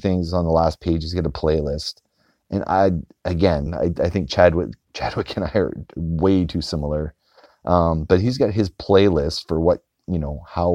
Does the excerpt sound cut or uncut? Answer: uncut